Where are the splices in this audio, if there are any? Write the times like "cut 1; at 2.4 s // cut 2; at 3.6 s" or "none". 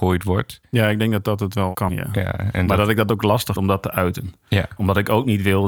cut 1; at 1.9 s // cut 2; at 3.6 s